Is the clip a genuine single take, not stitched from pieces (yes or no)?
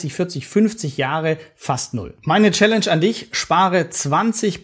yes